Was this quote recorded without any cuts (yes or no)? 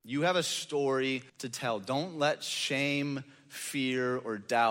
no